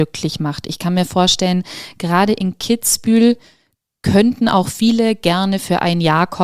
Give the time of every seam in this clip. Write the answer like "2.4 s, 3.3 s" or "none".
none